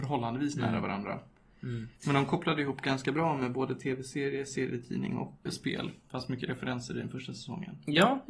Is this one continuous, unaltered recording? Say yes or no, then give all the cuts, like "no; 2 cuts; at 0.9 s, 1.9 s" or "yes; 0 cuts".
no; 3 cuts; at 2.0 s, 5.5 s, 6.0 s